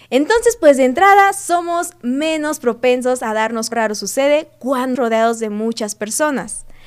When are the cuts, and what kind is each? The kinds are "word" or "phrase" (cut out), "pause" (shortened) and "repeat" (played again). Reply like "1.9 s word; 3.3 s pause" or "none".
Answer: 3.7 s phrase; 5.0 s word